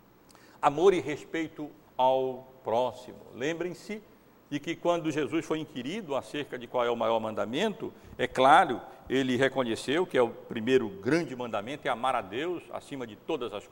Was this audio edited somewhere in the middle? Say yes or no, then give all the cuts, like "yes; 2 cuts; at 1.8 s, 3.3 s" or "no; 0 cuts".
no; 0 cuts